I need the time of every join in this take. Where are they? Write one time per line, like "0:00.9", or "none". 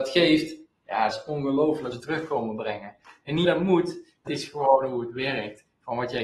0:01.1
0:01.9
0:03.4
0:04.3